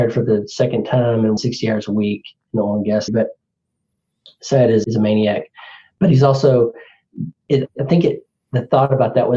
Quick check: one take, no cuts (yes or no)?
no